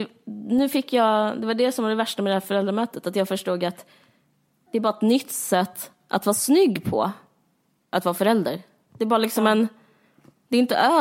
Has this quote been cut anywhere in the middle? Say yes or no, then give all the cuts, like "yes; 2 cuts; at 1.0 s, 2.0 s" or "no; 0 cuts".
no; 0 cuts